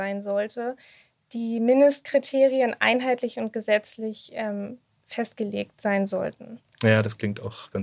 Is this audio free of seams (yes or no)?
yes